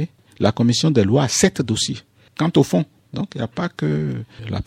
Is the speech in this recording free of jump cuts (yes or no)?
yes